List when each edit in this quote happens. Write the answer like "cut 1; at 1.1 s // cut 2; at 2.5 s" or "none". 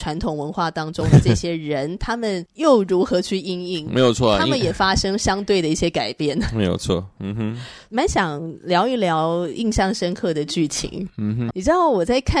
cut 1; at 11.5 s